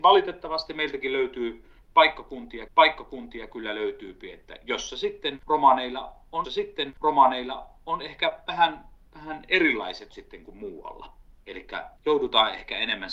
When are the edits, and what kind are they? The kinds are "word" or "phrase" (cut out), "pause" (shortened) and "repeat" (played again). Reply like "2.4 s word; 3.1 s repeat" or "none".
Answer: 2.7 s repeat; 6.4 s repeat; 10.1 s word; 12.0 s pause